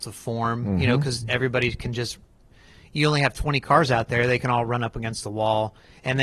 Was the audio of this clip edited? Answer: no; 0 cuts

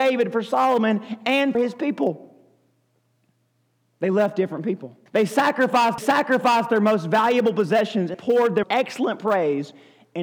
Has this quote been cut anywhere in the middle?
yes; 6 cuts; at 1.5 s, 2.9 s, 5.1 s, 6.0 s, 8.1 s, 8.6 s

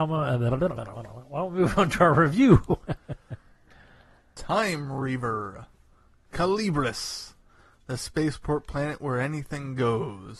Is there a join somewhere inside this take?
no; 0 cuts

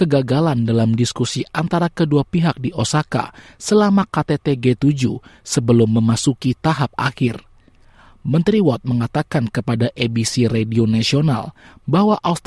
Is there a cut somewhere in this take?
no; 0 cuts

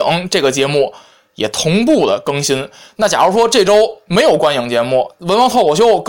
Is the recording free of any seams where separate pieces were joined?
yes; 0 cuts

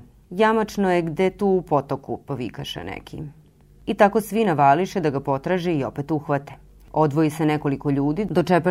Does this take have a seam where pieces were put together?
no; 0 cuts

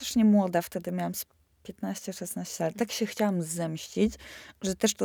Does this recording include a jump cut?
no; 0 cuts

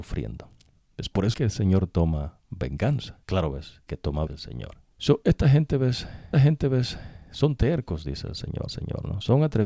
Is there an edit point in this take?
yes; 7 cuts; at 1.3 s, 3.2 s, 3.9 s, 4.3 s, 4.9 s, 6.3 s, 8.7 s

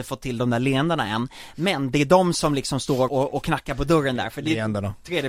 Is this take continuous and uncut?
no; 1 cut; at 3.1 s

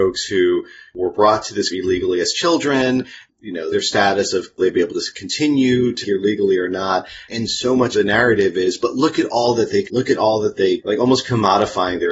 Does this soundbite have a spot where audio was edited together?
yes; 8 cuts; at 1.7 s, 3.7 s, 4.6 s, 6.0 s, 7.3 s, 7.9 s, 9.8 s, 10.8 s

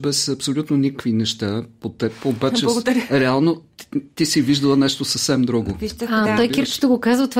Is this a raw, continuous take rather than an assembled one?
yes; 0 cuts

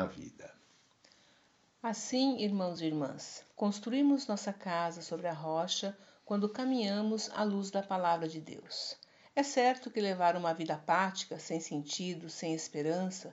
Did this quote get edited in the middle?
no; 0 cuts

